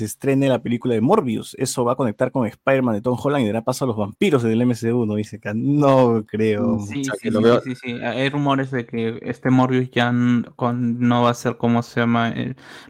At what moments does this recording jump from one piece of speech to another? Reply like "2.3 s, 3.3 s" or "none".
none